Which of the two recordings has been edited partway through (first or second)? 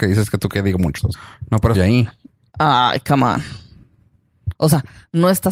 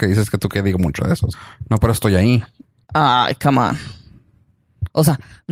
first